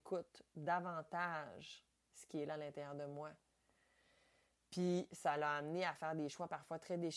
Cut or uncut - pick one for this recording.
uncut